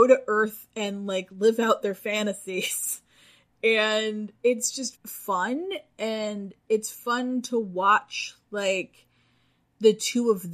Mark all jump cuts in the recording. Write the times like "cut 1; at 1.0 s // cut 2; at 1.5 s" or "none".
cut 1; at 4.3 s // cut 2; at 4.9 s